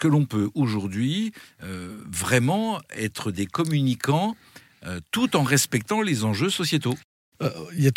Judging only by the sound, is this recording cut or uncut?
uncut